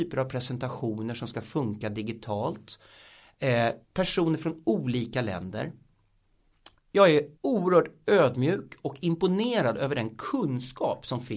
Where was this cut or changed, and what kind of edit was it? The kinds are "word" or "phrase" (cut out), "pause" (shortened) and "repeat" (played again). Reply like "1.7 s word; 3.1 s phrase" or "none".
3.8 s pause; 7.4 s pause